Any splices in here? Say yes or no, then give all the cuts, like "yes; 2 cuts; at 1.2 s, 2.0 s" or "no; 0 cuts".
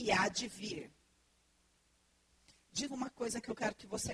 yes; 1 cut; at 2.9 s